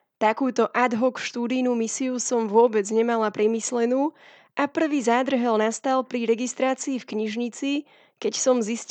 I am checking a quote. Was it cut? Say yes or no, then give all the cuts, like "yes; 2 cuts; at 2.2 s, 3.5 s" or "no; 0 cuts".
no; 0 cuts